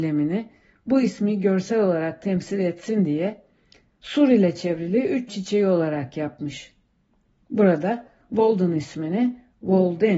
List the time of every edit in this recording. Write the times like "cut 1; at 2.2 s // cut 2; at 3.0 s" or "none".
cut 1; at 5.3 s

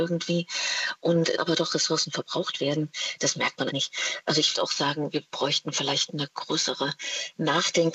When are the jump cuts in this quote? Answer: cut 1; at 1.4 s // cut 2; at 3.7 s // cut 3; at 4.5 s

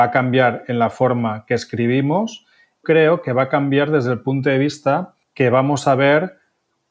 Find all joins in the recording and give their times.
cut 1; at 2.8 s // cut 2; at 5.2 s

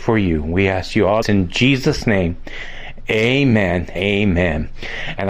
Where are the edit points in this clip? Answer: cut 1; at 1.2 s // cut 2; at 4.0 s

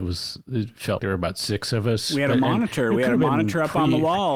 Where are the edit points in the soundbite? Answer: cut 1; at 1.0 s

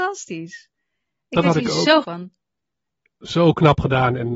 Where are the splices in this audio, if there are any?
cut 1; at 2.0 s

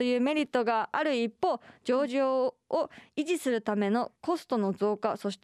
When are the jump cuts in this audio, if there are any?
cut 1; at 4.2 s

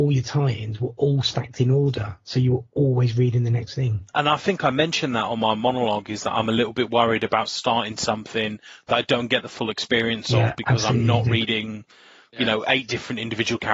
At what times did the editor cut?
none

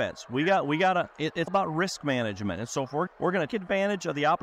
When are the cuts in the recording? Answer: cut 1; at 1.5 s // cut 2; at 3.1 s // cut 3; at 3.5 s

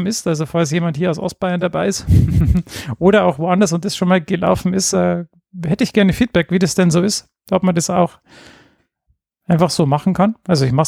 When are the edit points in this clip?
none

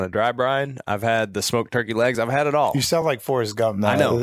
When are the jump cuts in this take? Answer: none

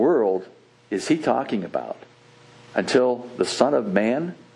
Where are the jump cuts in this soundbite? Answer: none

